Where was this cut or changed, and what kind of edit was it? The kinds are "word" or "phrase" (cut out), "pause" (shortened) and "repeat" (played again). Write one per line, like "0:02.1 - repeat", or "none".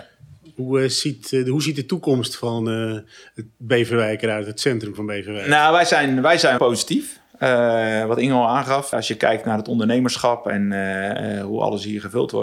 0:06.6 - phrase
0:08.9 - word